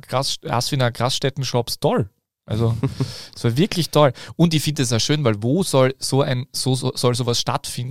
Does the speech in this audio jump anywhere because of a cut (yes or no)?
no